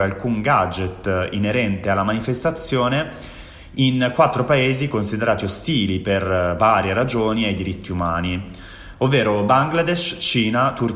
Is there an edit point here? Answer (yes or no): no